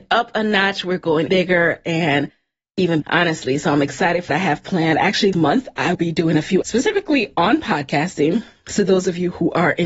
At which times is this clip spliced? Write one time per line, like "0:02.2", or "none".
0:01.3
0:03.0
0:04.3
0:05.3
0:05.9
0:06.6